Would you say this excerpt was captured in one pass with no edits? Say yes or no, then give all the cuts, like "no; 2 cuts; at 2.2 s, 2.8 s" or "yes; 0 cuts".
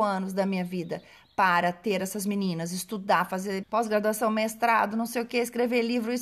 no; 1 cut; at 3.6 s